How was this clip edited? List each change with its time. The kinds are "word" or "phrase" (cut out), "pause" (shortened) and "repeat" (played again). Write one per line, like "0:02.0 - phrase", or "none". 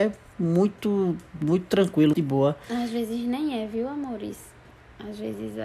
0:02.1 - word

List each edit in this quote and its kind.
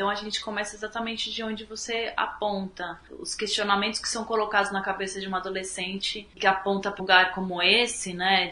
0:07.0 - word

